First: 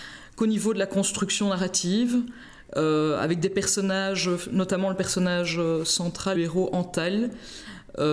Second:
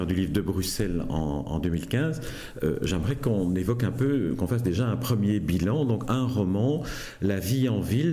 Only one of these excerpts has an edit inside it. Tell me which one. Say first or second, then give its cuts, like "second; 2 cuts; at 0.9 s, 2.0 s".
first; 1 cut; at 6.3 s